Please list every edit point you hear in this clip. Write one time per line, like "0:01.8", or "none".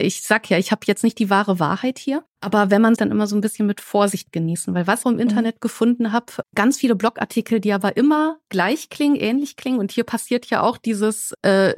0:02.3
0:03.0
0:05.0
0:06.4